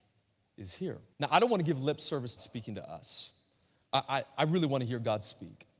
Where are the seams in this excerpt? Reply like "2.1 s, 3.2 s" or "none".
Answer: 1.1 s, 2.4 s, 4.3 s